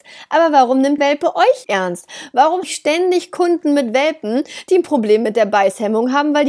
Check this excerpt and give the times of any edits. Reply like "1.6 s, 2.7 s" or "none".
1.0 s, 1.6 s, 2.6 s